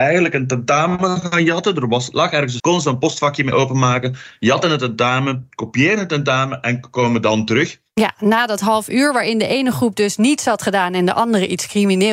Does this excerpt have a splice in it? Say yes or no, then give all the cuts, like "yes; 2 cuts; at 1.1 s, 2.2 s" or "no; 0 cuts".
yes; 1 cut; at 2.6 s